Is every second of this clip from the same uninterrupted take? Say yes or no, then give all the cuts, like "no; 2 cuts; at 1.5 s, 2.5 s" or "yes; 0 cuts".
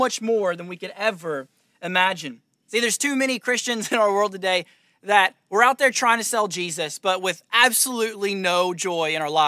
yes; 0 cuts